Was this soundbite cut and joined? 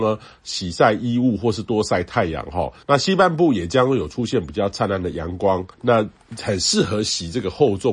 yes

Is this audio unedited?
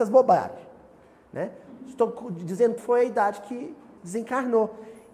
no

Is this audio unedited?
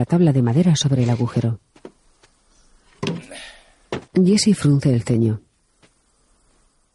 no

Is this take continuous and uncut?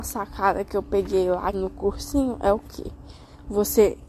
no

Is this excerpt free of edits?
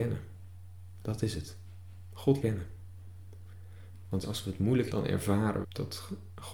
no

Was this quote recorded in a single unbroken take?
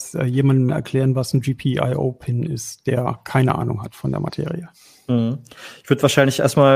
yes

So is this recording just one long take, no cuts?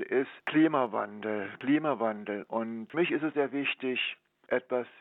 no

